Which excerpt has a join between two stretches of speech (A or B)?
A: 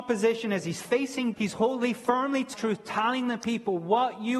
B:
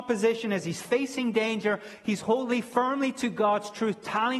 A